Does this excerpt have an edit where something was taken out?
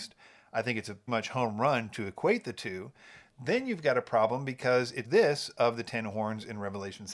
yes; 2 cuts; at 1.1 s, 5.0 s

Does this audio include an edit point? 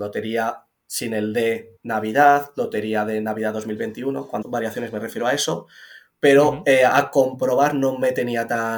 yes; 2 cuts; at 1.8 s, 4.4 s

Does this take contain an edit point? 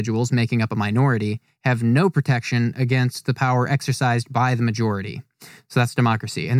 no; 0 cuts

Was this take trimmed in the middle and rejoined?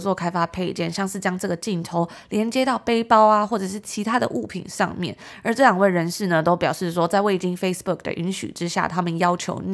no; 0 cuts

